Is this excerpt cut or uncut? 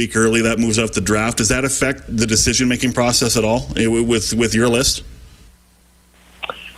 cut